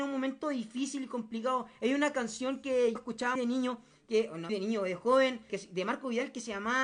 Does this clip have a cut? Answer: yes; 4 cuts; at 3.0 s, 3.4 s, 4.5 s, 5.5 s

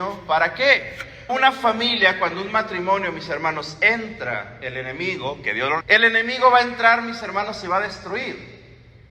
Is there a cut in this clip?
yes; 2 cuts; at 1.3 s, 5.8 s

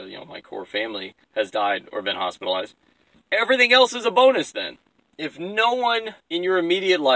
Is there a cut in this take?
yes; 4 cuts; at 1.2 s, 3.1 s, 4.9 s, 6.2 s

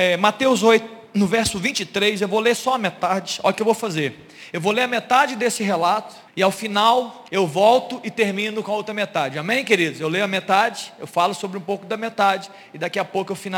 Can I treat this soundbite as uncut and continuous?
no; 2 cuts; at 6.3 s, 7.3 s

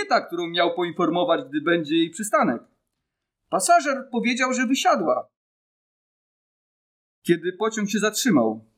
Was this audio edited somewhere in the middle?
no; 0 cuts

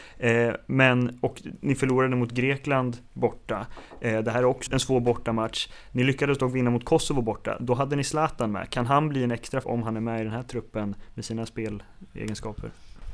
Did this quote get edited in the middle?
yes; 2 cuts; at 4.7 s, 9.6 s

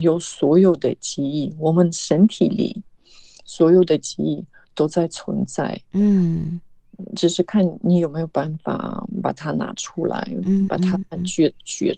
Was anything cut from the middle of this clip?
no; 0 cuts

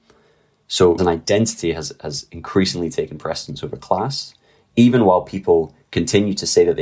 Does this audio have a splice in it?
yes; 1 cut; at 1.0 s

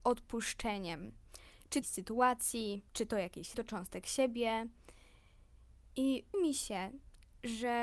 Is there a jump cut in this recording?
yes; 4 cuts; at 1.8 s, 2.9 s, 3.5 s, 6.3 s

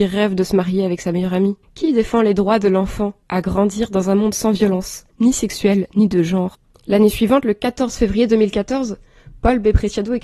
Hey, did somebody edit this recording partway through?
yes; 4 cuts; at 1.6 s, 3.2 s, 5.1 s, 6.7 s

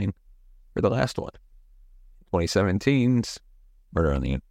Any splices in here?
no; 0 cuts

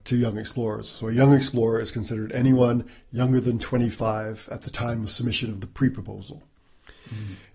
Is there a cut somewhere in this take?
no; 0 cuts

